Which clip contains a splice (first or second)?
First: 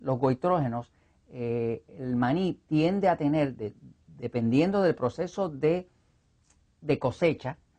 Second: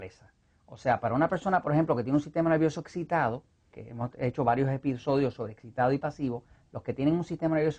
second